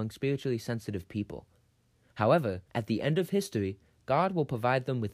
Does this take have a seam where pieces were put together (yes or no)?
yes